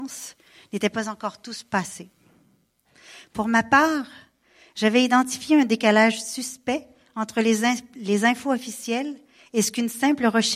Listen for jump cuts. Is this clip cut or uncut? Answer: uncut